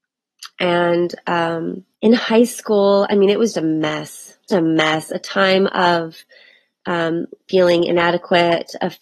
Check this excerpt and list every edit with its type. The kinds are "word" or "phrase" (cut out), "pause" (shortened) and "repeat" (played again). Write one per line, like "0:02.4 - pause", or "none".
0:01.9 - pause
0:03.5 - word
0:04.5 - word